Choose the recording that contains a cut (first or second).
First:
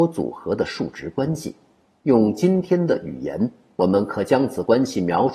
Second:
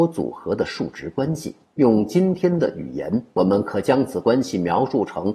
second